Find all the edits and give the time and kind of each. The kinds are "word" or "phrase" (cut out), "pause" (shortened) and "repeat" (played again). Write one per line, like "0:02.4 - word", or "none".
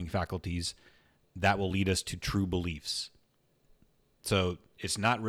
none